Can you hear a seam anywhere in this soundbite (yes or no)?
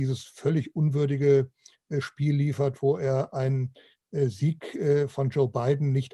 no